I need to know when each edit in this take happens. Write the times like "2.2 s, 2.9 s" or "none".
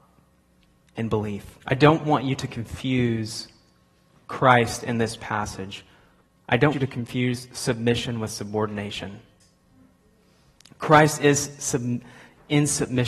1.6 s, 6.7 s